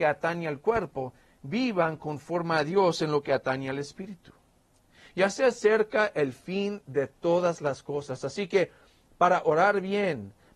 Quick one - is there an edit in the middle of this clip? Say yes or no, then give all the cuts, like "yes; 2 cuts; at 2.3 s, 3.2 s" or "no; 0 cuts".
no; 0 cuts